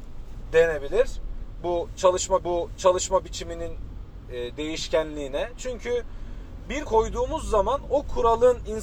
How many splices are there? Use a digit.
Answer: 2